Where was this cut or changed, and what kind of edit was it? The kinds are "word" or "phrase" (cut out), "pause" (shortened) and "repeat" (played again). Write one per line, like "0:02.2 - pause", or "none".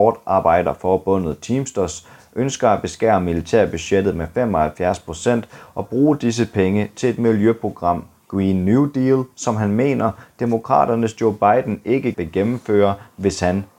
0:12.1 - word